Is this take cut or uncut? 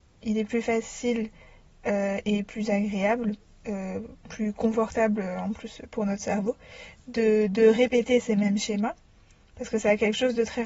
uncut